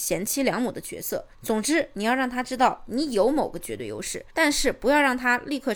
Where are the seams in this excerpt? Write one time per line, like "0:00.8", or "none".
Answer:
0:01.3
0:04.3